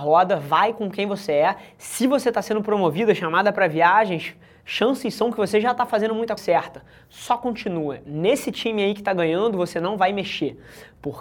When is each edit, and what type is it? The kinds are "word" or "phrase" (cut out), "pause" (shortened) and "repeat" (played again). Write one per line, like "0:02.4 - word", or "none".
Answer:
0:06.4 - word